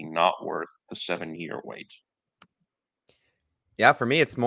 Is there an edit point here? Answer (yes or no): yes